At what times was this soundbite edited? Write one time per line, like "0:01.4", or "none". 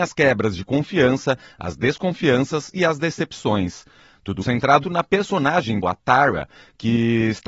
0:04.4
0:04.8
0:05.8